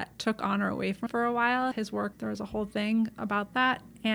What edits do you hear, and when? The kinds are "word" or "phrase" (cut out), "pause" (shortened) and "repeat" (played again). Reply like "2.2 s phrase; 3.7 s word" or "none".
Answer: 1.1 s word; 1.7 s word; 2.1 s word